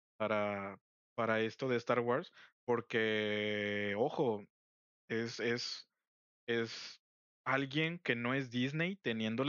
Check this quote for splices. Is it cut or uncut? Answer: uncut